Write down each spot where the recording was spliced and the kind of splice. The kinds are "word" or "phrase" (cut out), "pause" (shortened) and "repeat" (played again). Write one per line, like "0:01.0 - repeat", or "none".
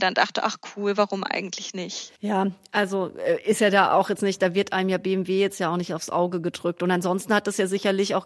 0:02.2 - pause